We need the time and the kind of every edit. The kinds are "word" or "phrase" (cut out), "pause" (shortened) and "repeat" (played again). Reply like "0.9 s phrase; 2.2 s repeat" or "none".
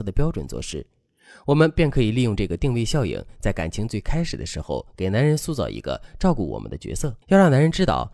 7.2 s pause